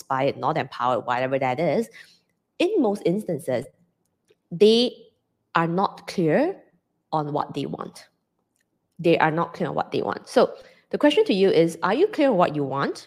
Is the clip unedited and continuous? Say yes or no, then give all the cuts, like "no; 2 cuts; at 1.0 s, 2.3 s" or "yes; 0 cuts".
yes; 0 cuts